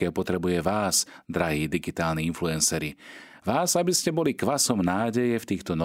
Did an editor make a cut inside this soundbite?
no; 0 cuts

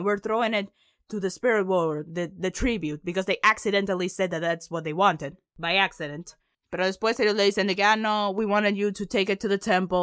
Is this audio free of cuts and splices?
yes; 0 cuts

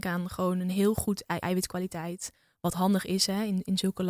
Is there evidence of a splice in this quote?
yes; 1 cut; at 1.4 s

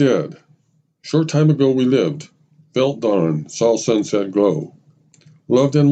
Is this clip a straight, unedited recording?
yes; 0 cuts

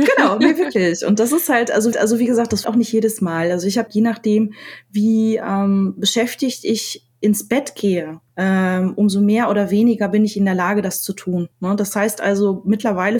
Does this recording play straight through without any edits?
no; 5 cuts; at 1.9 s, 2.6 s, 3.9 s, 8.3 s, 11.5 s

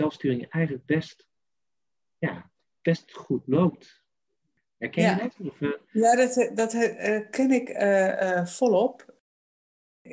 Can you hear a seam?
no; 0 cuts

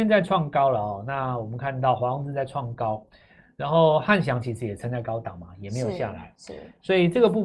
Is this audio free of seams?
yes; 0 cuts

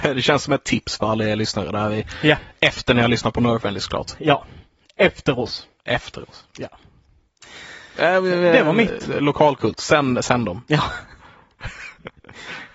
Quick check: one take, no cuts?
yes; 0 cuts

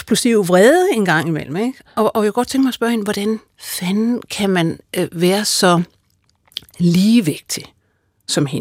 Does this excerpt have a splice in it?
no; 0 cuts

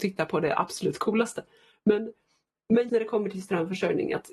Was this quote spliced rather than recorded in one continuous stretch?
yes; 1 cut; at 2.9 s

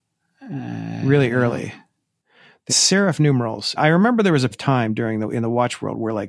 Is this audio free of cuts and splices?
no; 3 cuts; at 2.7 s, 3.8 s, 4.5 s

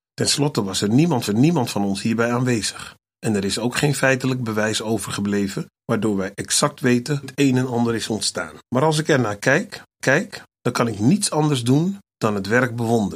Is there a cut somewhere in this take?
yes; 7 cuts; at 1.3 s, 3.1 s, 5.7 s, 7.2 s, 8.6 s, 10.0 s, 12.1 s

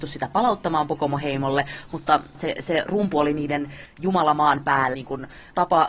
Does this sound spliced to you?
yes; 1 cut; at 4.9 s

